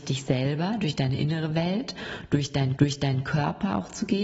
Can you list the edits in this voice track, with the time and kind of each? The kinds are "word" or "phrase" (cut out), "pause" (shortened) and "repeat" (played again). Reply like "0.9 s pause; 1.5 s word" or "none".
2.8 s repeat